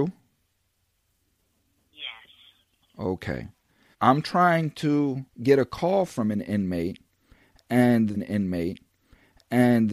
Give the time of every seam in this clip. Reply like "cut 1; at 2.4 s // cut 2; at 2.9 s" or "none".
cut 1; at 3.9 s // cut 2; at 5.3 s // cut 3; at 8.1 s

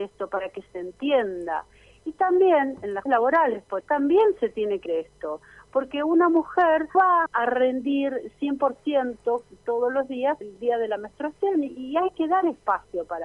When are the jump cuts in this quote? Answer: cut 1; at 3.1 s // cut 2; at 3.8 s // cut 3; at 4.9 s // cut 4; at 6.9 s // cut 5; at 7.3 s // cut 6; at 10.4 s

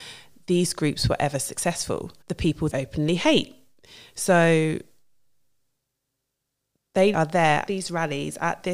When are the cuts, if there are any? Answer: cut 1; at 2.2 s // cut 2; at 2.7 s // cut 3; at 7.1 s // cut 4; at 7.7 s

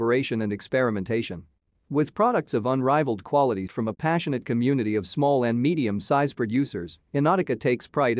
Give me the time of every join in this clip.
cut 1; at 3.7 s

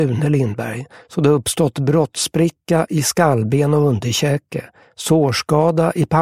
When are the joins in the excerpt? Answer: none

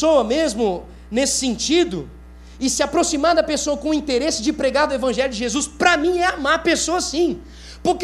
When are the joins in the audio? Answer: none

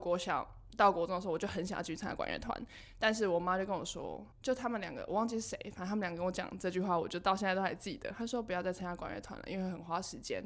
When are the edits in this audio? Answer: cut 1; at 4.3 s

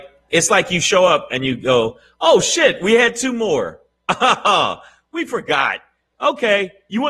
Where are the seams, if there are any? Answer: none

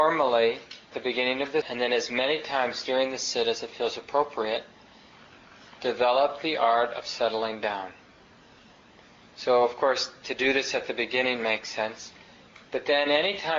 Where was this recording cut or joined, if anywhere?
cut 1; at 0.9 s // cut 2; at 1.6 s

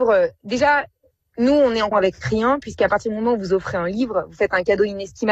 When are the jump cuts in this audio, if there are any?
cut 1; at 1.9 s

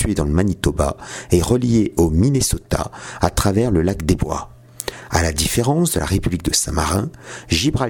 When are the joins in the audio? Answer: none

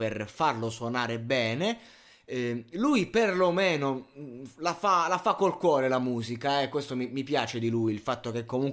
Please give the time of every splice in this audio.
none

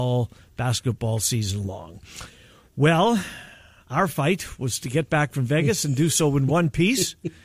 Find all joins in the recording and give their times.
none

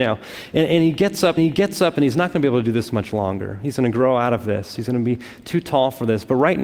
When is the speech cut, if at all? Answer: cut 1; at 1.4 s

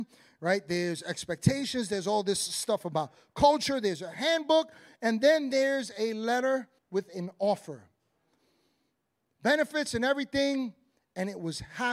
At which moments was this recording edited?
cut 1; at 6.8 s

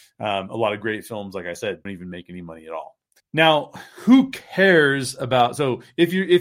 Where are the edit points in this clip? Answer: cut 1; at 1.9 s // cut 2; at 3.2 s

